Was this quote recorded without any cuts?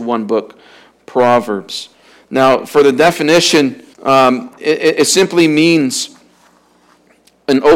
no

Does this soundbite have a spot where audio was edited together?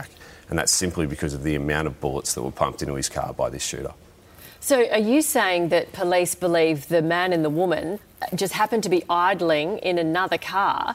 no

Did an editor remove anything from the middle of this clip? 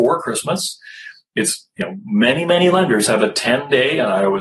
no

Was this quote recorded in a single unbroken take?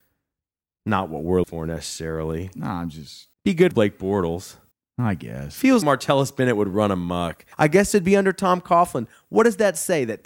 no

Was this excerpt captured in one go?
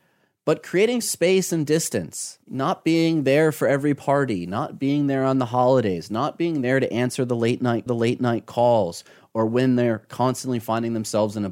no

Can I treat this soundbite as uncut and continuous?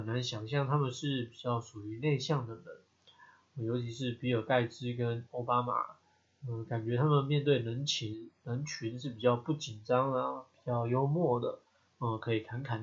yes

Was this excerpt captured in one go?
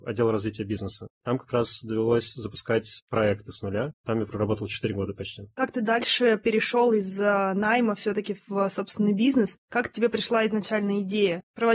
no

